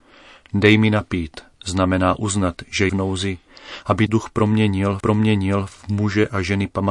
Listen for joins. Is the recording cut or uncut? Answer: cut